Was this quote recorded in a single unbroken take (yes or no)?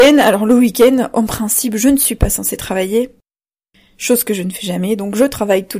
yes